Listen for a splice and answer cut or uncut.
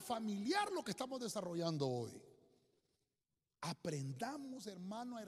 uncut